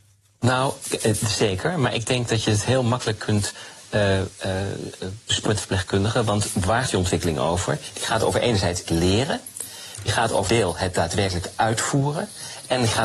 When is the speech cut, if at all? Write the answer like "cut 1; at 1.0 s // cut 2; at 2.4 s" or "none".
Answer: cut 1; at 5.5 s // cut 2; at 6.9 s // cut 3; at 8.9 s // cut 4; at 10.5 s